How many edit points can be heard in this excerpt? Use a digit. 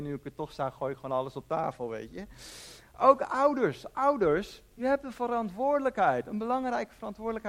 0